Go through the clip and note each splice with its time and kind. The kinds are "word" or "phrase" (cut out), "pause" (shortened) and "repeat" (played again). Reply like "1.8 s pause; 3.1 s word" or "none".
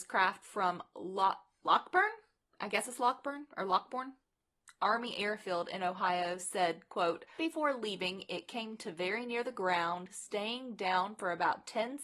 7.4 s word